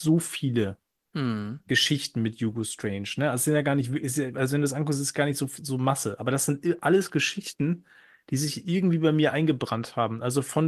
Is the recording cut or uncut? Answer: uncut